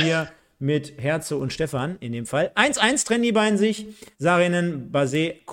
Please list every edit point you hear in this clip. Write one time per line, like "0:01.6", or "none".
0:04.1